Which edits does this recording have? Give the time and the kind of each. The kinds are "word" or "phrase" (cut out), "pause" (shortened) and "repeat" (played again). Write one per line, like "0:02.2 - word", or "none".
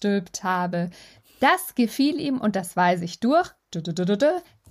none